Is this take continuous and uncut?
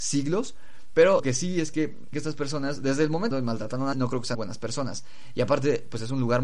no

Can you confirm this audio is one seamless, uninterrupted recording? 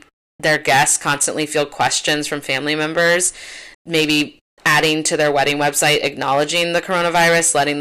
no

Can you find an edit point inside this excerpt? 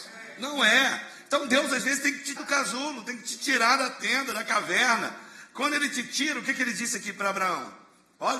yes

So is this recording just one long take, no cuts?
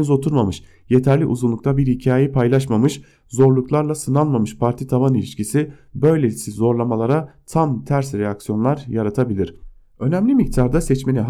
yes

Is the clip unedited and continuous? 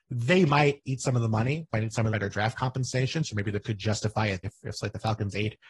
no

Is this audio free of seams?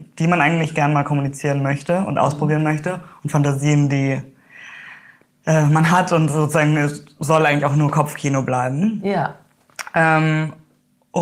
yes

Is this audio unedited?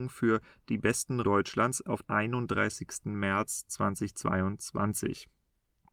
no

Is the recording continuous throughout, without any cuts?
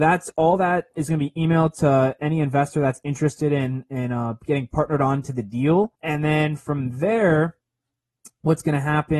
no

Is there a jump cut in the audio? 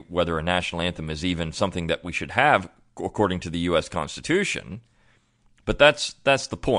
no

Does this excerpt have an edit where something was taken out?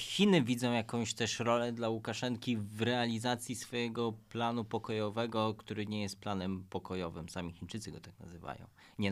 no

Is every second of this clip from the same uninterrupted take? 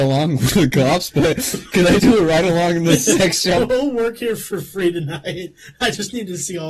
no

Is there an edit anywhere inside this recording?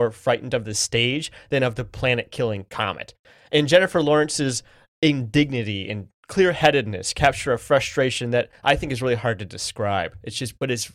no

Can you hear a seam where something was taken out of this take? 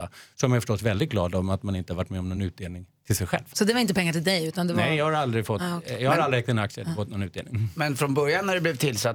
no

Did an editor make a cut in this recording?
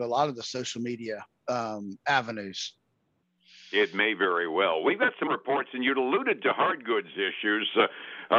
yes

